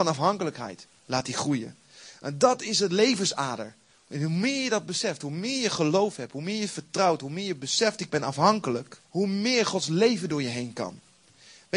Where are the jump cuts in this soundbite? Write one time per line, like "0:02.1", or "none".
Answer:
0:09.0